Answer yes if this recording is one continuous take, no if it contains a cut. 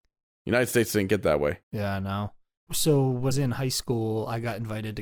no